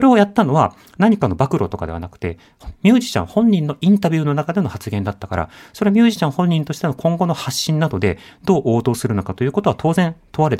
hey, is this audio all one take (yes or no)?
yes